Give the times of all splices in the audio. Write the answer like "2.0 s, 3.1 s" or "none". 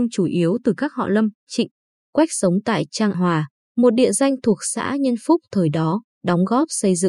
3.1 s